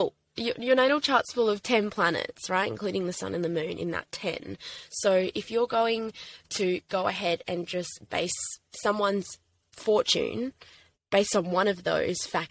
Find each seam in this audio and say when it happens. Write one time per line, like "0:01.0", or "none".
none